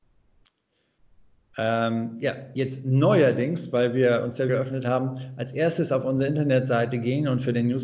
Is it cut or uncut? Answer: cut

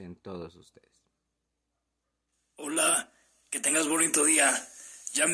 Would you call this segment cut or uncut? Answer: uncut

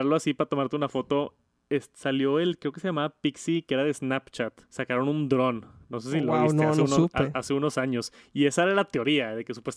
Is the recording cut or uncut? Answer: cut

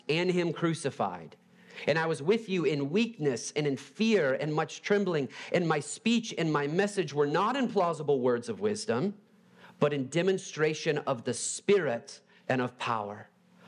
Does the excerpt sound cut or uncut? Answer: uncut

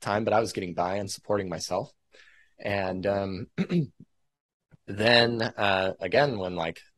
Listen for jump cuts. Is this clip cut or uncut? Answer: uncut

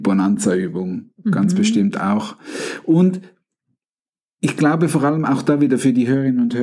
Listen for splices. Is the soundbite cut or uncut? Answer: uncut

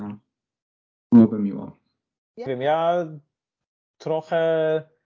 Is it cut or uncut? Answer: cut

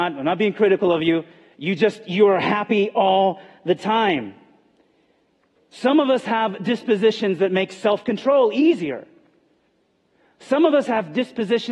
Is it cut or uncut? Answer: uncut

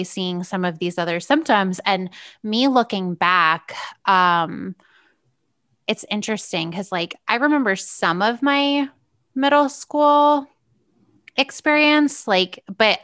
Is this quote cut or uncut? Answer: uncut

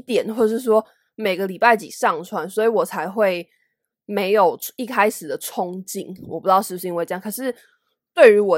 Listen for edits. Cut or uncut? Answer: uncut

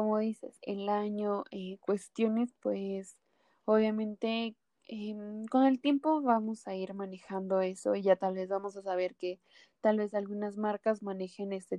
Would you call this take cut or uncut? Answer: uncut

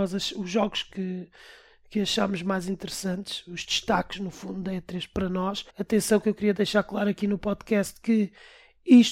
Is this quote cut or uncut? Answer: cut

